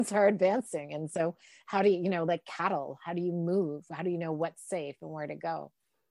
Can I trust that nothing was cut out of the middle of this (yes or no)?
yes